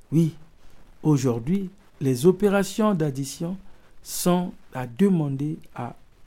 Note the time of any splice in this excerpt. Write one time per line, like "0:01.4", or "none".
none

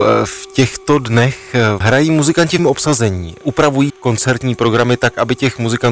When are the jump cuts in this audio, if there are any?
0:01.8
0:02.6
0:03.9

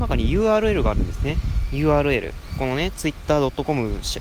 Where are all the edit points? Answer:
none

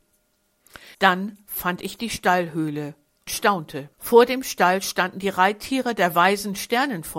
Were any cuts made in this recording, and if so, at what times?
0:00.9
0:03.3
0:03.9

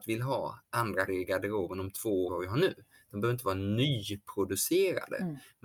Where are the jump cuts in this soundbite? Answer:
0:01.1
0:02.3

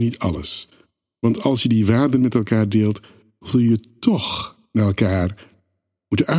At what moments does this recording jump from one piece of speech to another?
none

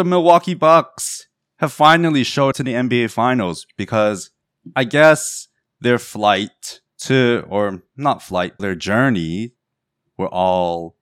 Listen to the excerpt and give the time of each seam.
0:02.5
0:06.9
0:08.6

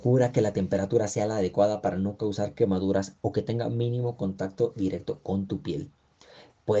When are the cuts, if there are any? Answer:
none

